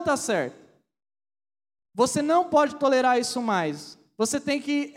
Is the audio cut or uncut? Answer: uncut